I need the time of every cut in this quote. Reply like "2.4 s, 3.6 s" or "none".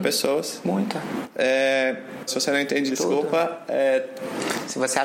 2.3 s, 2.9 s